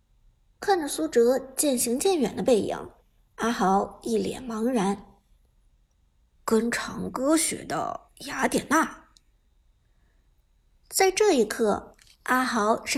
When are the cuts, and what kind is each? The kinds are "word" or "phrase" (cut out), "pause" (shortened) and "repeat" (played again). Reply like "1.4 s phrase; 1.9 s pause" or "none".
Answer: none